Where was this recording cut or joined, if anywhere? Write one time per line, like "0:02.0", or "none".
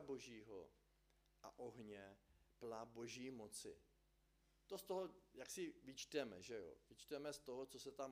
none